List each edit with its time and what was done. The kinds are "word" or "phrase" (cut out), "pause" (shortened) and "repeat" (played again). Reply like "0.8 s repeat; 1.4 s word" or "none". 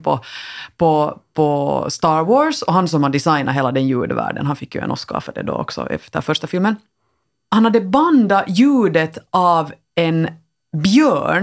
none